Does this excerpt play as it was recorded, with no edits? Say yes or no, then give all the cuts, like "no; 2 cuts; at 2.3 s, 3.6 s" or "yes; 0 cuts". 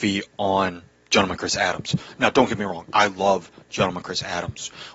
yes; 0 cuts